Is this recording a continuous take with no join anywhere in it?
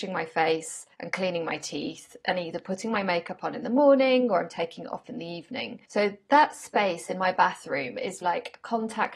no; 3 cuts; at 0.9 s, 5.8 s, 8.2 s

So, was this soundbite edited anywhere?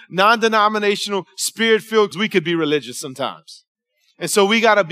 yes; 1 cut; at 2.1 s

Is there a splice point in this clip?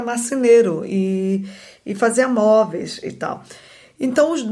no; 0 cuts

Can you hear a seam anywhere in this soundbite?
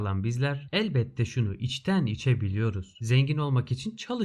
no; 0 cuts

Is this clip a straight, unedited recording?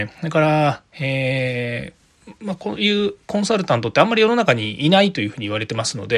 no; 1 cut; at 2.4 s

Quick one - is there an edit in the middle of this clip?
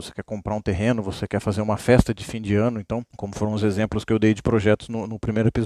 no; 0 cuts

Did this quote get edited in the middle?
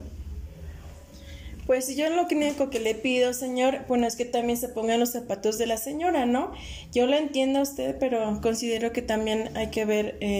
no; 0 cuts

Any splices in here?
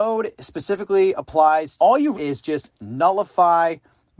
yes; 2 cuts; at 1.8 s, 2.1 s

